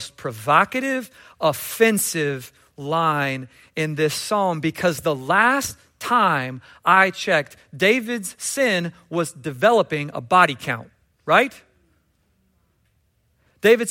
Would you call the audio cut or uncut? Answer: uncut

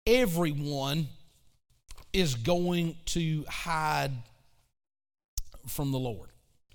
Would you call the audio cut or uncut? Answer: uncut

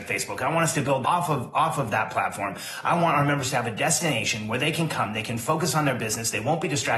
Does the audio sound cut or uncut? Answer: cut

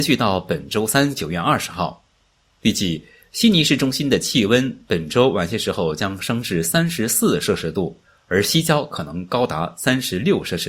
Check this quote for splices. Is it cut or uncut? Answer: uncut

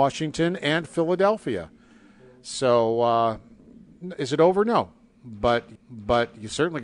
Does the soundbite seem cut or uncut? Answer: cut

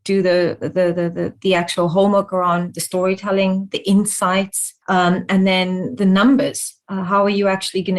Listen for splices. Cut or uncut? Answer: cut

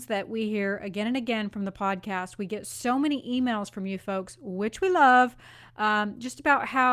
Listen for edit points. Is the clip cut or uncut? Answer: uncut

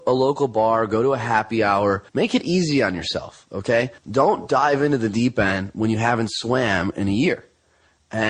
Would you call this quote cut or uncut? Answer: cut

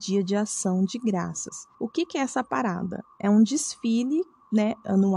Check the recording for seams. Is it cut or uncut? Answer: cut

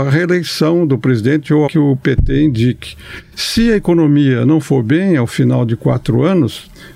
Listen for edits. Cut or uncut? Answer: cut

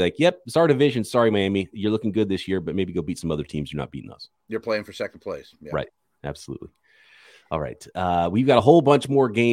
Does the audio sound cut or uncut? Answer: uncut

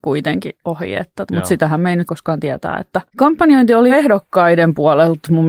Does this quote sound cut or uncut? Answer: cut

